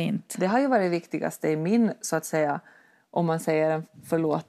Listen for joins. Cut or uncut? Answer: uncut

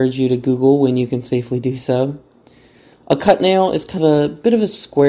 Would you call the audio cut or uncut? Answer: cut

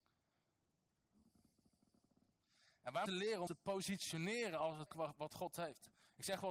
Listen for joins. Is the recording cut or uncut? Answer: cut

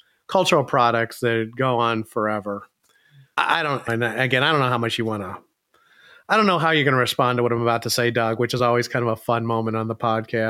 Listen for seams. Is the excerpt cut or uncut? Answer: uncut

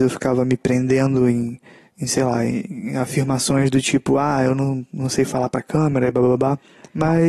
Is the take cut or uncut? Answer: uncut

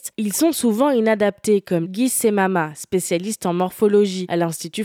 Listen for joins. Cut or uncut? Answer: cut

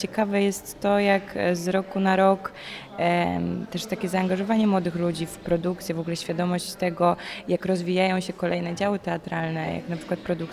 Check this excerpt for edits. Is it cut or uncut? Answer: uncut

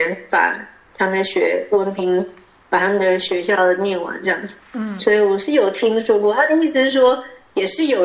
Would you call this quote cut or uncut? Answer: uncut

